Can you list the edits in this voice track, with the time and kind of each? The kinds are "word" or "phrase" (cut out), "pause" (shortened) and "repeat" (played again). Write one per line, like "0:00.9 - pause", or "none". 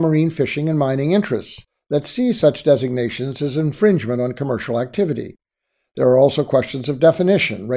none